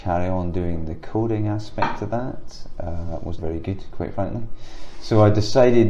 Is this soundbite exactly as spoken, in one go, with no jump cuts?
no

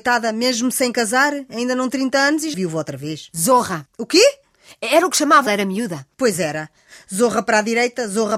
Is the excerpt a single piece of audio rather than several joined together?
no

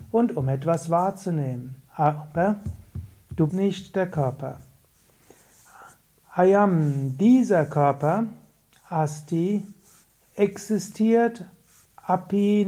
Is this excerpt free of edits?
no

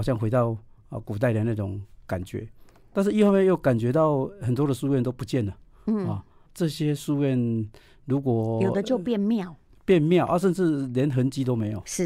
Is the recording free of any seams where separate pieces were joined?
no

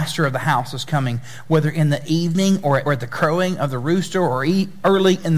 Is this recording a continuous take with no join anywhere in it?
no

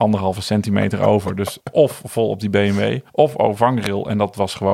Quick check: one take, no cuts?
no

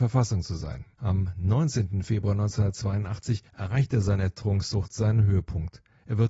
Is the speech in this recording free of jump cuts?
no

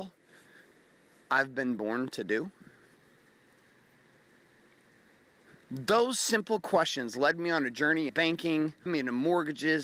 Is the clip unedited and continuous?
no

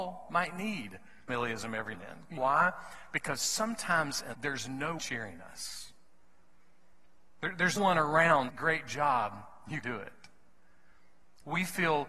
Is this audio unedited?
no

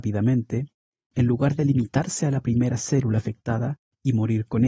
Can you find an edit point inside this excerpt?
no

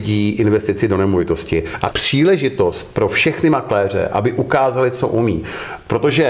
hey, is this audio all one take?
no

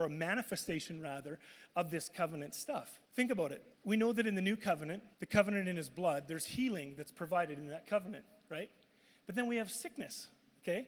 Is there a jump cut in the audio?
yes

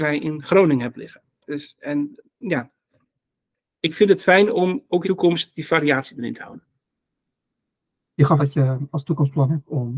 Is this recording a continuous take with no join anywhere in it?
no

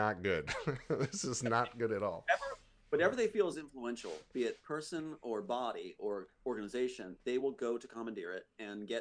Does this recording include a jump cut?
no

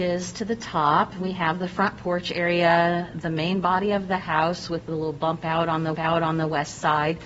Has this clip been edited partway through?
yes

